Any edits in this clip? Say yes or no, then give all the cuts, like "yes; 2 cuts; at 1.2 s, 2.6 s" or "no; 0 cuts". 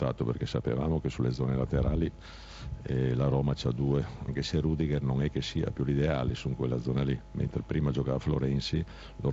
yes; 2 cuts; at 4.3 s, 5.8 s